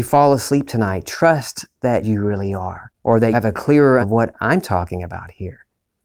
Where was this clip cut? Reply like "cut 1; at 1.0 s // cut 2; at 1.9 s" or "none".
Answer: cut 1; at 2.0 s // cut 2; at 2.9 s // cut 3; at 3.3 s // cut 4; at 4.0 s